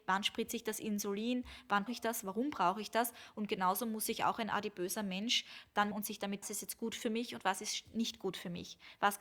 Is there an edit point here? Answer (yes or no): yes